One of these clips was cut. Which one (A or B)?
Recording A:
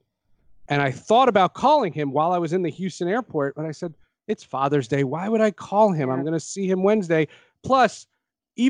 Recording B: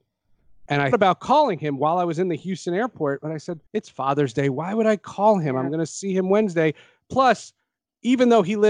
B